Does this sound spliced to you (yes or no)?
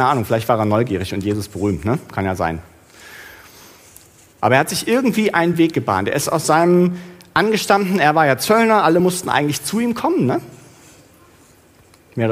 no